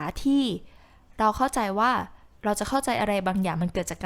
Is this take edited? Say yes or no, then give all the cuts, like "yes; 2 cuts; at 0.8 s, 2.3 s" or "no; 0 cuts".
yes; 1 cut; at 2.3 s